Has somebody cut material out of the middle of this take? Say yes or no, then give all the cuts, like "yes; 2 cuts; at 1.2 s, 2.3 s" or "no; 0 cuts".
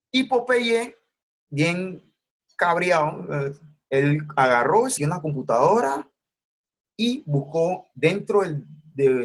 yes; 1 cut; at 5.0 s